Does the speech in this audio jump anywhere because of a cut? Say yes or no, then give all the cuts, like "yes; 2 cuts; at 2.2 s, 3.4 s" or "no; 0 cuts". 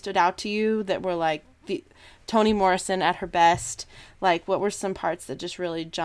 no; 0 cuts